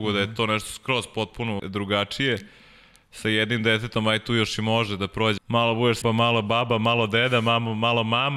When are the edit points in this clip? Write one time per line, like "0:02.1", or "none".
0:01.6
0:05.4
0:06.0